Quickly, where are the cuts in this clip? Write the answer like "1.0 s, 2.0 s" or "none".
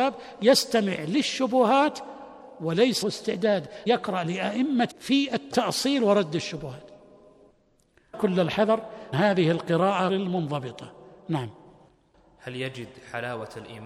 3.0 s, 3.9 s, 4.9 s, 8.1 s, 9.1 s, 10.1 s